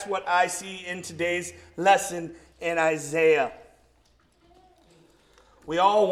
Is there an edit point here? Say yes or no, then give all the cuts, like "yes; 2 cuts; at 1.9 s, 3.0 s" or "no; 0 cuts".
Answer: no; 0 cuts